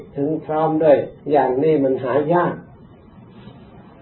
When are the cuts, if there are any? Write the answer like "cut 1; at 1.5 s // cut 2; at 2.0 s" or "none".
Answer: cut 1; at 1.2 s